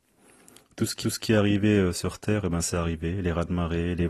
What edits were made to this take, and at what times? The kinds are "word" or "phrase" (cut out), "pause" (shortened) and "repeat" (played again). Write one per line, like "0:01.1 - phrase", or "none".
0:01.0 - repeat

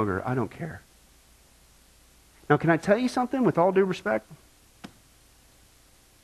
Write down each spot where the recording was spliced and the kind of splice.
none

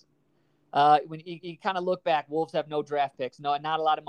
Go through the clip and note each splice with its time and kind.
0:01.4 - repeat

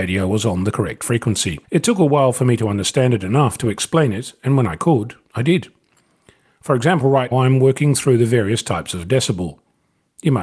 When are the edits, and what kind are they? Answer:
0:01.6 - pause
0:07.3 - word

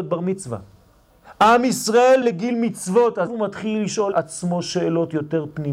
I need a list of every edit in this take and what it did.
0:02.2 - word
0:03.3 - word
0:04.1 - word

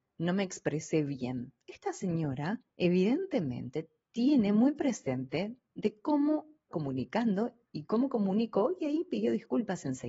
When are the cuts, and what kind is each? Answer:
0:02.7 - pause
0:06.7 - phrase

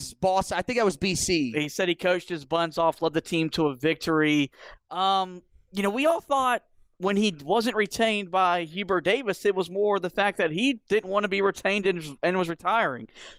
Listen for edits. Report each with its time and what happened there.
none

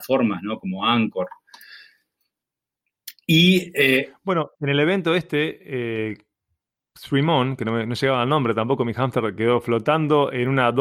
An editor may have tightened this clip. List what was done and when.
0:04.5 - pause

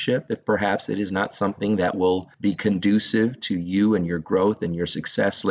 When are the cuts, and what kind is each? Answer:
none

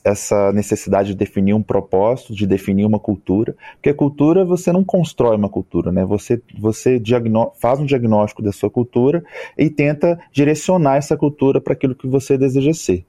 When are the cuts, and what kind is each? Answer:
none

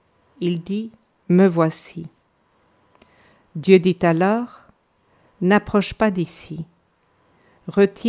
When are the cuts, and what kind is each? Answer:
none

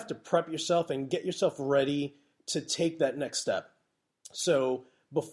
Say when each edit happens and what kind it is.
none

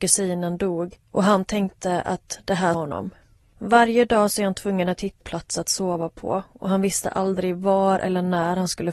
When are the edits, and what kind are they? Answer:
0:01.0 - pause
0:02.7 - phrase
0:03.4 - pause
0:05.2 - phrase

